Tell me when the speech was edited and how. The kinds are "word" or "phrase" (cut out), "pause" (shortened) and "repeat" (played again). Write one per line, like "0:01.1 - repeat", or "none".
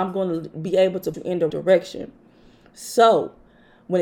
0:01.1 - word
0:01.5 - word